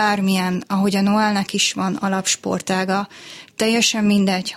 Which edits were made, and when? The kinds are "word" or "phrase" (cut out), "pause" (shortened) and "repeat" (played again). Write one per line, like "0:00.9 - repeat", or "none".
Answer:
none